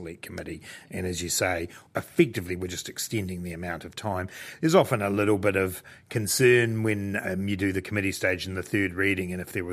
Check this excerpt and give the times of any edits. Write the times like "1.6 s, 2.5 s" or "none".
1.9 s